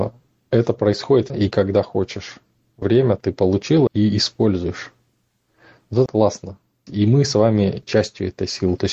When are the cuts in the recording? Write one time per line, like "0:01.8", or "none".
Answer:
0:01.3
0:02.8
0:03.9
0:06.1
0:06.9
0:07.8